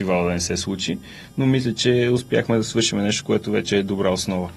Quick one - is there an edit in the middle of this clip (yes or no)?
no